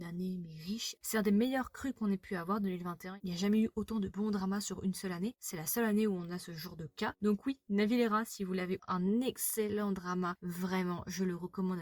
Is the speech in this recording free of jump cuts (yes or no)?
no